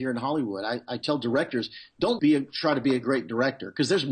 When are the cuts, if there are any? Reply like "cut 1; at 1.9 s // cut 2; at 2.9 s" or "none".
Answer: cut 1; at 2.2 s